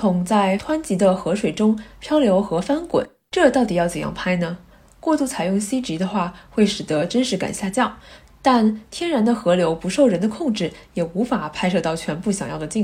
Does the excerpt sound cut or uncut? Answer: uncut